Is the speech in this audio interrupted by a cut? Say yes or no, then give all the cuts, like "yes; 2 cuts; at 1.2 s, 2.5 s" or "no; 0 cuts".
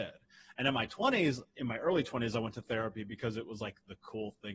no; 0 cuts